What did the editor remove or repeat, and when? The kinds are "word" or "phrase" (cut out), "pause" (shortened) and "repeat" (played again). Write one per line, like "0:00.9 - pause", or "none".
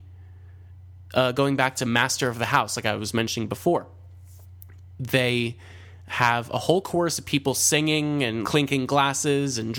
0:08.4 - word

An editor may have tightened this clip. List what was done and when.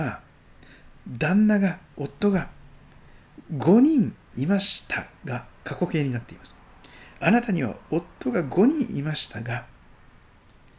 0:05.6 - pause

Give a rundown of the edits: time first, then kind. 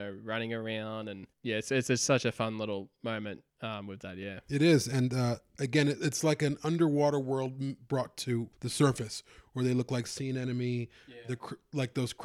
0:01.3 - pause
0:03.5 - pause
0:08.5 - pause

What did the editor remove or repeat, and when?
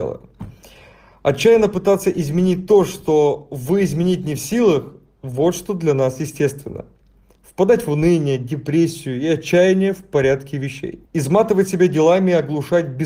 0:11.1 - pause

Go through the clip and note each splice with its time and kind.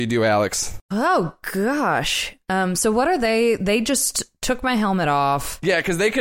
none

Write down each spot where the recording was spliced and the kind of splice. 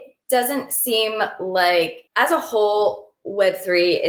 0:02.1 - pause

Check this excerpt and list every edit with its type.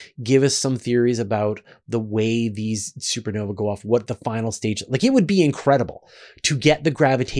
none

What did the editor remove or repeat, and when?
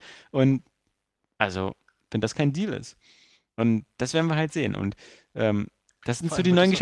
none

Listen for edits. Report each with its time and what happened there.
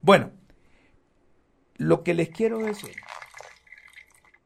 none

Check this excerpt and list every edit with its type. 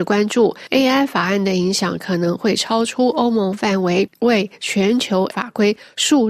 0:05.3 - word

